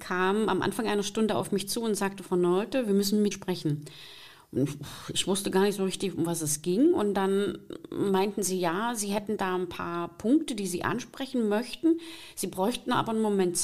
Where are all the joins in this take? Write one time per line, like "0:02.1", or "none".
0:03.3